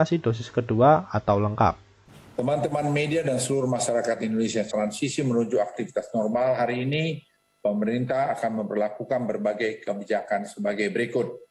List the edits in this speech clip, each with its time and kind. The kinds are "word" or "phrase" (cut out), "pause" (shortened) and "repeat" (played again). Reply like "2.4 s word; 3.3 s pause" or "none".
2.1 s pause; 4.7 s phrase